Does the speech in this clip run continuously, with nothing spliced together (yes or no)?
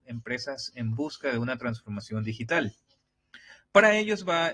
yes